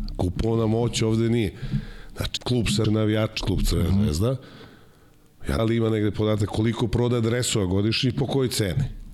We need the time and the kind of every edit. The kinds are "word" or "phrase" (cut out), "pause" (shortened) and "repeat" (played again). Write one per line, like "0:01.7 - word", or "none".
0:02.4 - phrase
0:02.8 - word
0:03.4 - phrase
0:05.6 - phrase